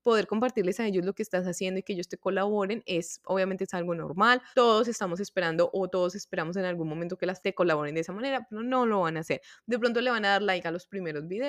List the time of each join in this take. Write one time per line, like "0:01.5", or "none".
0:04.5
0:07.4